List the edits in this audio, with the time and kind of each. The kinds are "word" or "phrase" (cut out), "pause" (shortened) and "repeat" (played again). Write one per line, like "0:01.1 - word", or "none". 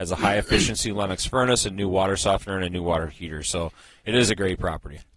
none